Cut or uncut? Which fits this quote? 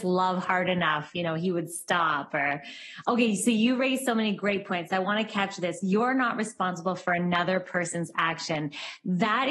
uncut